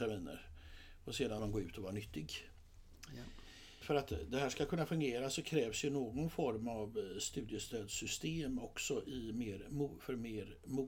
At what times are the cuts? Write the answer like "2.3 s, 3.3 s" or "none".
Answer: 1.4 s